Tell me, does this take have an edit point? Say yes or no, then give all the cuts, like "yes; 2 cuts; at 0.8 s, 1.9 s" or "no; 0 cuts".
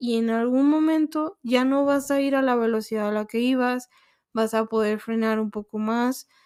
no; 0 cuts